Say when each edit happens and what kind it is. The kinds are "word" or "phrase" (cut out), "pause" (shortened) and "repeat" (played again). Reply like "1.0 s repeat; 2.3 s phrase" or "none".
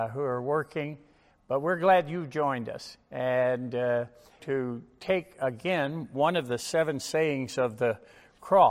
4.4 s phrase